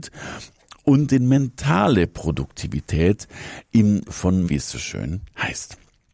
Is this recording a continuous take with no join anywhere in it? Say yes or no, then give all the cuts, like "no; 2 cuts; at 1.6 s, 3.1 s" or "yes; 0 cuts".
no; 2 cuts; at 4.0 s, 4.4 s